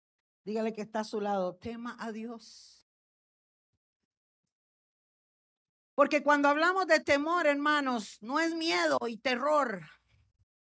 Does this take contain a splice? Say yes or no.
no